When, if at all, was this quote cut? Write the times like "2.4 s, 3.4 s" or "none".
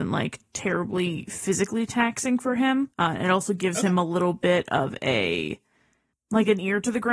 2.9 s